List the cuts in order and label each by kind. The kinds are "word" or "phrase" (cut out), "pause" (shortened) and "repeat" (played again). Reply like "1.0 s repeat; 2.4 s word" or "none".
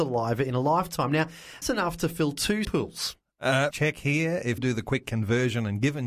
1.6 s word; 2.6 s word; 3.7 s word; 4.6 s word